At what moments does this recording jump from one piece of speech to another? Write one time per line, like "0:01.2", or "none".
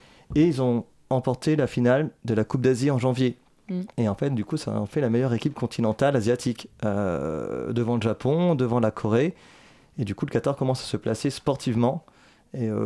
none